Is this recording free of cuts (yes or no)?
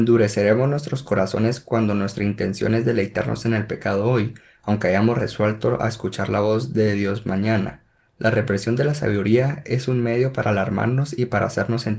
yes